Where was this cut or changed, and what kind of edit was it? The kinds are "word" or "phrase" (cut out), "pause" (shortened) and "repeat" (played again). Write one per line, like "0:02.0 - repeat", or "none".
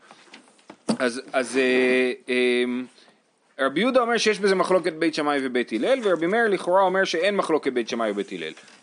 none